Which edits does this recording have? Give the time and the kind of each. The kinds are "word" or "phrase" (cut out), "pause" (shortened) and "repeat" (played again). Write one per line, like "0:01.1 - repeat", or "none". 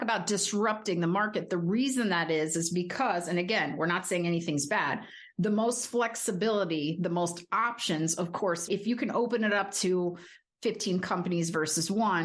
none

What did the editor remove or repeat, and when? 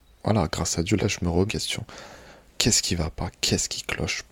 0:01.0 - word
0:01.5 - word

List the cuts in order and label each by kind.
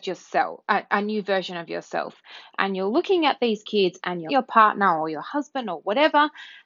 0:04.3 - phrase

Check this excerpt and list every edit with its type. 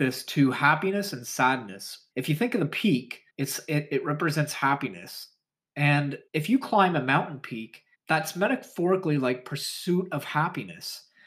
0:02.1 - pause
0:03.3 - pause
0:06.3 - pause
0:07.9 - pause

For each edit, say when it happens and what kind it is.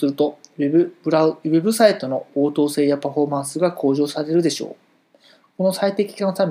none

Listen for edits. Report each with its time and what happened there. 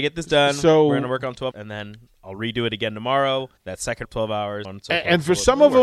0:01.5 - word
0:03.6 - pause
0:04.0 - phrase
0:04.6 - word

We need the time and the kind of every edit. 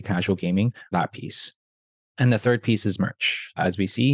0:00.9 - word

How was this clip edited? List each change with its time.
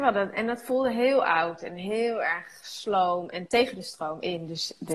none

